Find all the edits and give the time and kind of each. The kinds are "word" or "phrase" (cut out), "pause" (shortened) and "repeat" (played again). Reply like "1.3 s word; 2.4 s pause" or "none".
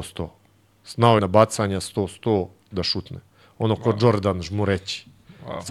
1.2 s phrase